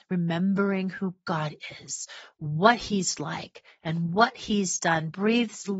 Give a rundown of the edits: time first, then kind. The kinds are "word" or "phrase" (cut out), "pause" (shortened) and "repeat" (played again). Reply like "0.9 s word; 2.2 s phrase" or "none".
none